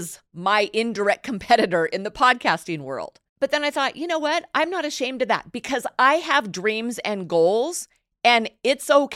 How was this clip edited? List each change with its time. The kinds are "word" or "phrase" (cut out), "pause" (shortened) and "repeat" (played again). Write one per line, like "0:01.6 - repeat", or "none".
0:03.3 - pause